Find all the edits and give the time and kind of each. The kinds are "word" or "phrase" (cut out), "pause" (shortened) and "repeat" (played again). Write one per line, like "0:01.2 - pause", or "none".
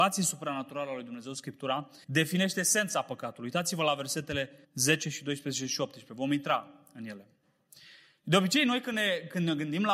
0:02.0 - pause
0:04.6 - pause